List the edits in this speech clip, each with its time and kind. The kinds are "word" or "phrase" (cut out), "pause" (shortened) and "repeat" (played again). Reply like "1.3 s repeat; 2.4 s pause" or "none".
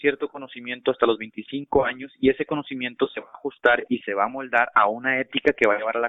none